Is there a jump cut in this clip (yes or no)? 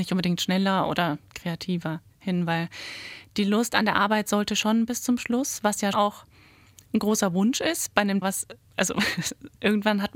yes